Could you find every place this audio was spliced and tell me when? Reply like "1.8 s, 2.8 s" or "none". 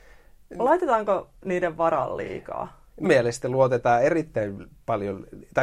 1.4 s, 3.0 s